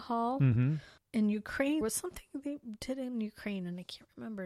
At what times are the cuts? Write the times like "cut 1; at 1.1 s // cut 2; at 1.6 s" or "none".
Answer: cut 1; at 1.0 s // cut 2; at 1.8 s